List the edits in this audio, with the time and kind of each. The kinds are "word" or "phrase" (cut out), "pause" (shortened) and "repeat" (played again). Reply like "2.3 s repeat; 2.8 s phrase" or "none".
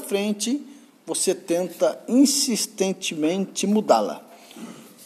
none